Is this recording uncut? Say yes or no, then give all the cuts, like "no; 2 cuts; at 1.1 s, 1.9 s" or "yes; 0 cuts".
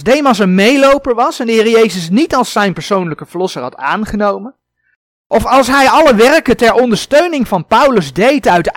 yes; 0 cuts